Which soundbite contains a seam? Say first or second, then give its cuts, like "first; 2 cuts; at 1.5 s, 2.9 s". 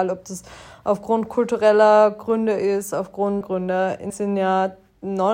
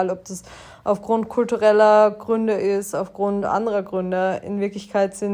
first; 2 cuts; at 3.4 s, 4.1 s